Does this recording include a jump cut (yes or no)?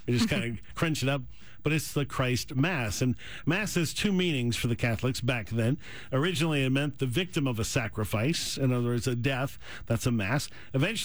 no